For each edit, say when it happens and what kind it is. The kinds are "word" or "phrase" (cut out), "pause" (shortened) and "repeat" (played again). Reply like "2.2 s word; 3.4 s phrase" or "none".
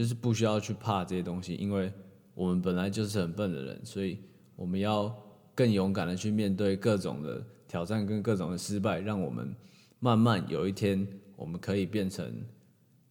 none